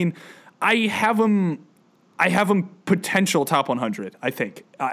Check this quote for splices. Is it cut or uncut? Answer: uncut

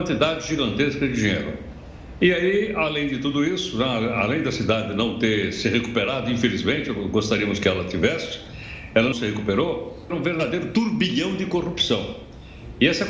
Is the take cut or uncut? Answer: cut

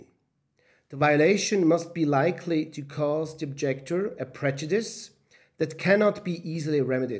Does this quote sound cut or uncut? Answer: uncut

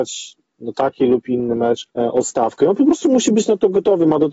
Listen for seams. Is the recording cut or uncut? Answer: cut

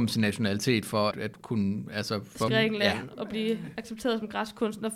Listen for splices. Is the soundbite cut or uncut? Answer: cut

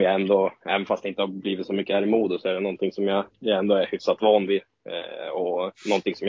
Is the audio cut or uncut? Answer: uncut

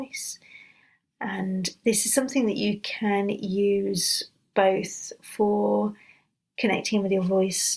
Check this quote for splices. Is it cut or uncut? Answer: uncut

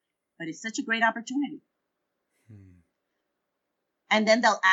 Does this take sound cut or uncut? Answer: uncut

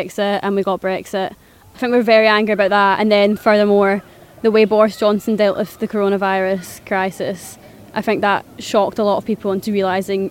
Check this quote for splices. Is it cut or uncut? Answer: uncut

